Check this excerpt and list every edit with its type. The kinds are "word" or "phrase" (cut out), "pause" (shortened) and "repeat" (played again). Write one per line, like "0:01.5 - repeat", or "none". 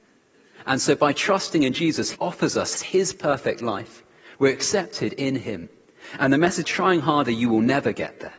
0:02.1 - word
0:02.7 - phrase
0:06.6 - phrase